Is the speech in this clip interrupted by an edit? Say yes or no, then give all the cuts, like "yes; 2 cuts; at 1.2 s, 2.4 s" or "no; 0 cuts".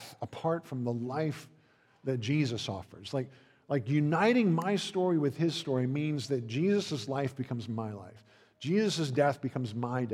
no; 0 cuts